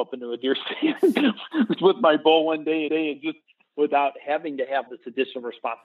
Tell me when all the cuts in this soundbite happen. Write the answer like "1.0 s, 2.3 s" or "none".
1.8 s, 2.9 s, 3.7 s, 4.9 s